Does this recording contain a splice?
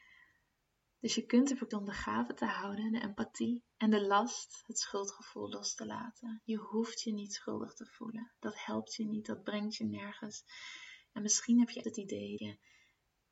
yes; 4 cuts; at 1.7 s, 3.7 s, 11.8 s, 12.4 s

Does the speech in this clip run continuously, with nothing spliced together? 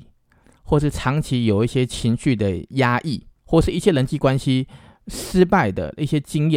no; 1 cut; at 3.4 s

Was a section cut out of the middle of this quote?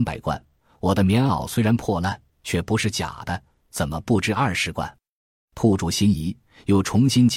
no; 0 cuts

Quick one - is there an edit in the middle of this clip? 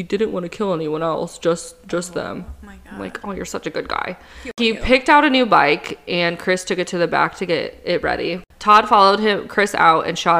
no; 0 cuts

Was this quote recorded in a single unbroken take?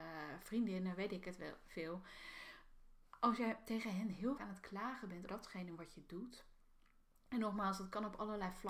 no; 2 cuts; at 4.4 s, 5.3 s

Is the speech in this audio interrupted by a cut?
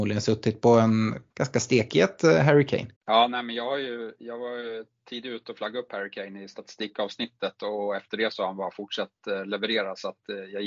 yes; 2 cuts; at 1.3 s, 2.9 s

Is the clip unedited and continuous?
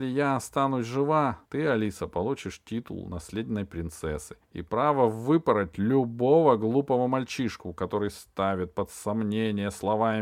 no; 2 cuts; at 1.5 s, 4.4 s

